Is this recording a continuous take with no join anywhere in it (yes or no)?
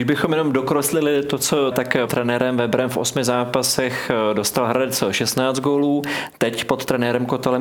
no